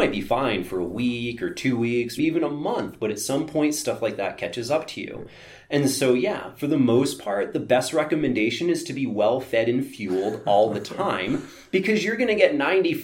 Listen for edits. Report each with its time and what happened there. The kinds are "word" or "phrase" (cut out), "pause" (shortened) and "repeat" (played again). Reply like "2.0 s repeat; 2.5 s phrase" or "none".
2.2 s word